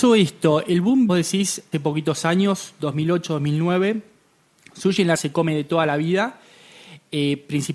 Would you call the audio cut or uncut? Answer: cut